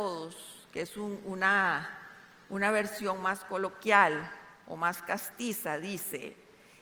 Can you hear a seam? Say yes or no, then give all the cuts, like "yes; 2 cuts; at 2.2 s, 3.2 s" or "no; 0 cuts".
no; 0 cuts